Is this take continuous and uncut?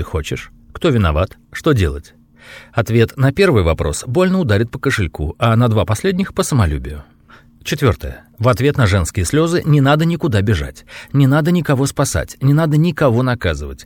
yes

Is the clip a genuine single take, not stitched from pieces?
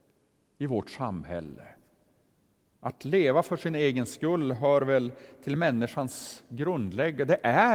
yes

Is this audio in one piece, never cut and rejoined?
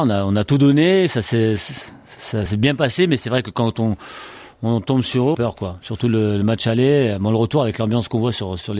no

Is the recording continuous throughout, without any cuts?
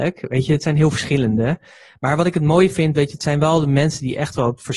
yes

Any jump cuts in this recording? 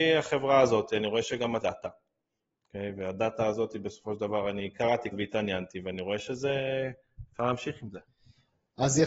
yes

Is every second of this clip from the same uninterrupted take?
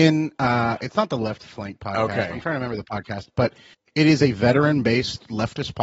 yes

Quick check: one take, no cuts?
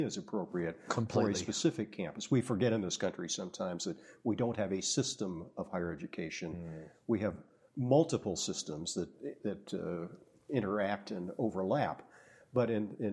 yes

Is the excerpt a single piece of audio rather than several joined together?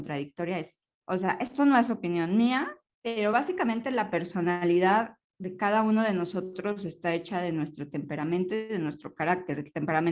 yes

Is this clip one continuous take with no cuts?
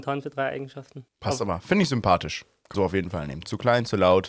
no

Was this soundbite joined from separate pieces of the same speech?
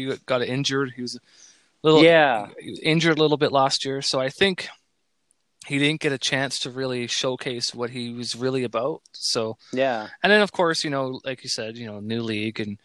no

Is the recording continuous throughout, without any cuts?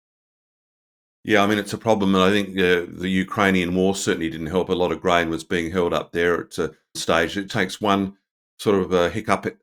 no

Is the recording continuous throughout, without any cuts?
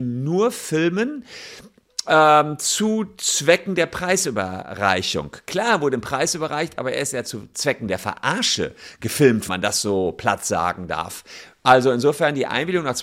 no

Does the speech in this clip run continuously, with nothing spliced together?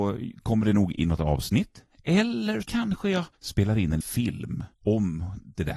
no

